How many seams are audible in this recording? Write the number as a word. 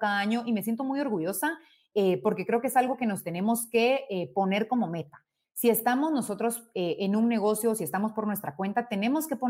zero